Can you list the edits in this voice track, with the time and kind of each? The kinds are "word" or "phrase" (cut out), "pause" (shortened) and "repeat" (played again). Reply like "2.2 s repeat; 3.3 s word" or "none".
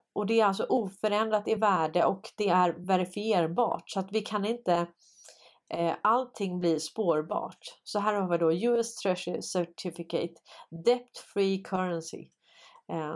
none